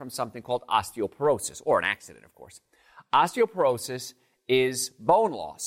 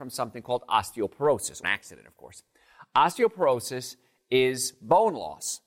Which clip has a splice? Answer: second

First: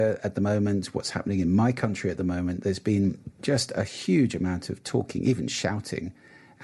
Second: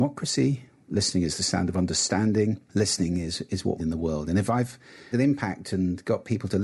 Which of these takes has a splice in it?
second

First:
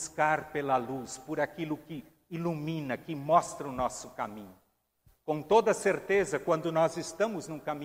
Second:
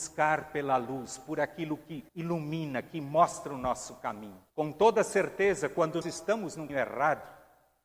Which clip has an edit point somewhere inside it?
second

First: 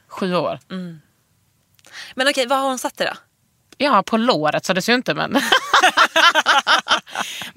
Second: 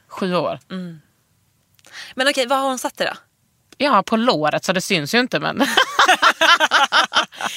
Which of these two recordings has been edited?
first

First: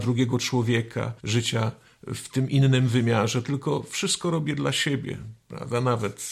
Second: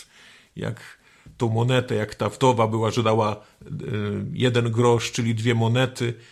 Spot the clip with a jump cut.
first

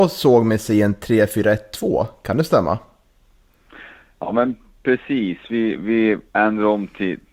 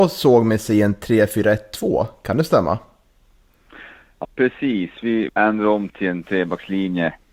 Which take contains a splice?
second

